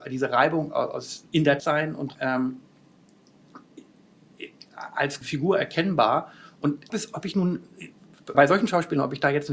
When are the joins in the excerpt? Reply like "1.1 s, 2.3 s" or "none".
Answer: 1.3 s, 1.6 s, 2.1 s, 5.2 s, 6.9 s, 8.3 s

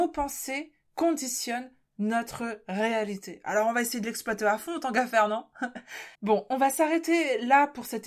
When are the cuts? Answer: 6.1 s

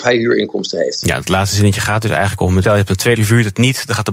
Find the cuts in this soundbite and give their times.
2.6 s, 3.2 s

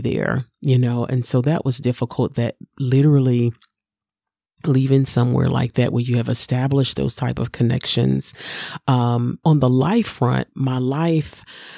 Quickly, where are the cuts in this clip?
9.4 s

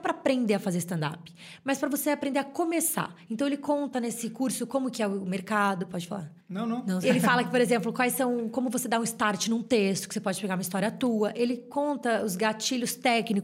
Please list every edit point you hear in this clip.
6.4 s, 7.0 s

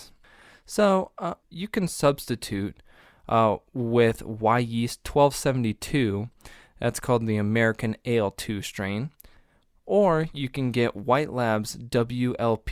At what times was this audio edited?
none

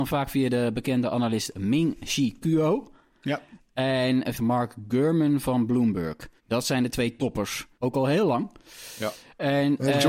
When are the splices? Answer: 4.3 s, 6.4 s, 7.7 s

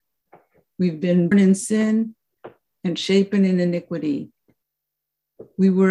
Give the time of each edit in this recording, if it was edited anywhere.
1.3 s

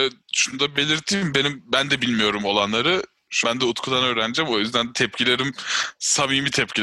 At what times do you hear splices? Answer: 3.4 s

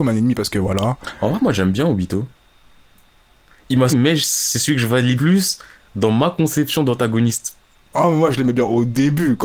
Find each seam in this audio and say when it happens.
3.9 s, 5.2 s

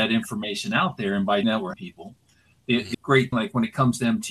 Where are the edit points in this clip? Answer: 1.4 s, 1.7 s, 2.9 s, 3.3 s

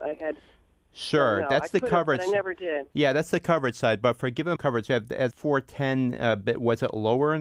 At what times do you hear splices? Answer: 4.6 s, 5.3 s

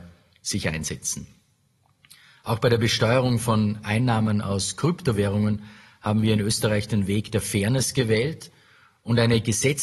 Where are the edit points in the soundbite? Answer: none

